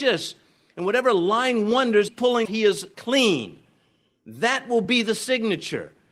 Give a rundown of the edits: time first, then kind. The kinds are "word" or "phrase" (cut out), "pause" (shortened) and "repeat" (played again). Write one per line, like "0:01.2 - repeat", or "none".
0:02.1 - word
0:02.4 - word
0:02.9 - word